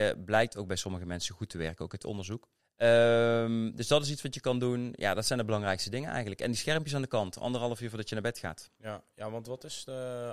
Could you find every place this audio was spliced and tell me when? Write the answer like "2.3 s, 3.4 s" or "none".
2.6 s